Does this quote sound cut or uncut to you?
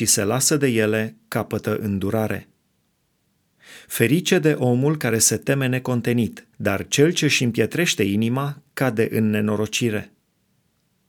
cut